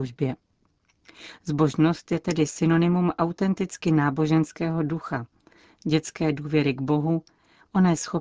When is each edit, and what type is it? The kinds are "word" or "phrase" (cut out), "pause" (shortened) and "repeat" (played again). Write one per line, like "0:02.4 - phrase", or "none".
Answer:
none